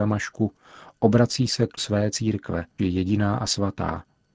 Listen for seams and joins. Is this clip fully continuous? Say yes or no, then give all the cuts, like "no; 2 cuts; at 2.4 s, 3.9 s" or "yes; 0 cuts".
no; 2 cuts; at 1.8 s, 2.8 s